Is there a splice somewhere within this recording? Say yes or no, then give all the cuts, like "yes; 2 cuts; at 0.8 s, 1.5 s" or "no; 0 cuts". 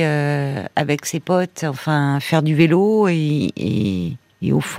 no; 0 cuts